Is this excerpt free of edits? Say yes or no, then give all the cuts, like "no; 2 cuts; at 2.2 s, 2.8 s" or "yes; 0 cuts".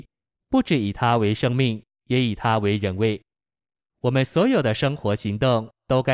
yes; 0 cuts